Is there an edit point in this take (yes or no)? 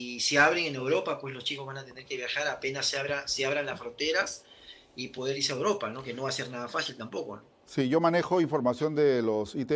no